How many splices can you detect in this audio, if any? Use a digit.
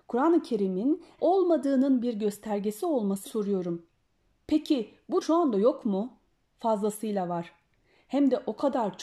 4